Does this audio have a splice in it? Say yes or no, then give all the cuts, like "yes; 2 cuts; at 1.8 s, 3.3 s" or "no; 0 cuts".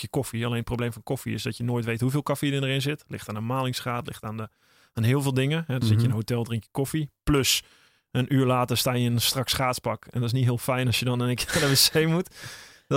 no; 0 cuts